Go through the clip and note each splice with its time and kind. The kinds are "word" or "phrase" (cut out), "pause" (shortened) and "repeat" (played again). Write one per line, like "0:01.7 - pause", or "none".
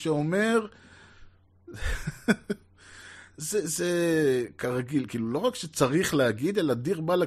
none